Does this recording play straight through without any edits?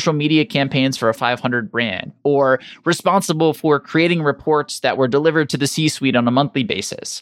no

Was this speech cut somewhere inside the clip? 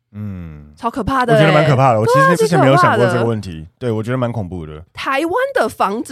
yes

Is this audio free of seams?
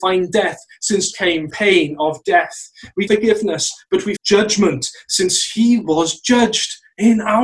no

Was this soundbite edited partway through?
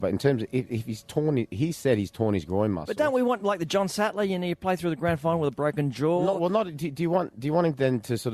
no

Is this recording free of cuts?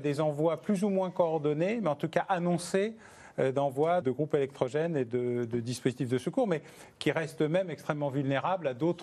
no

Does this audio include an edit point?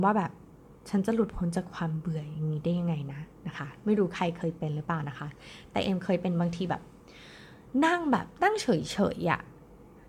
yes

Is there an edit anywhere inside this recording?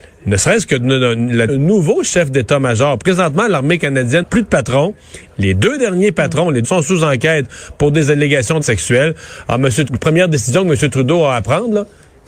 yes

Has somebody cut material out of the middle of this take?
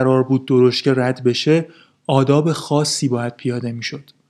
no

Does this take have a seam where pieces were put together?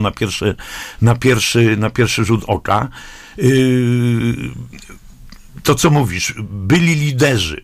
no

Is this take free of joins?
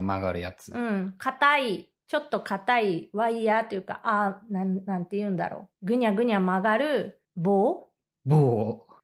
no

